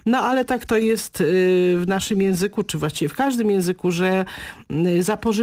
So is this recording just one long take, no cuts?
yes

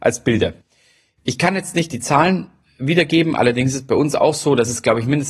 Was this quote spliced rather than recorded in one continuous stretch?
no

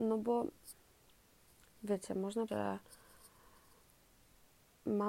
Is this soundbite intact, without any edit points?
no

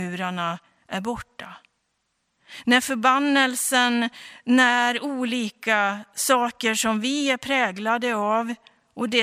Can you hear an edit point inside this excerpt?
no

